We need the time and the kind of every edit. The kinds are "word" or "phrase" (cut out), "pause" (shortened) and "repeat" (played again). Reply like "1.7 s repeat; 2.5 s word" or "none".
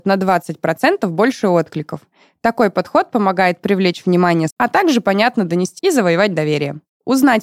4.5 s word; 5.8 s word